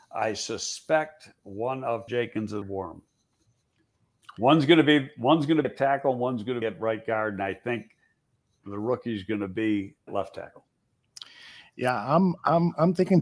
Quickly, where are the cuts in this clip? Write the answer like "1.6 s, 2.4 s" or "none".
2.1 s, 2.6 s, 5.6 s, 6.6 s, 10.1 s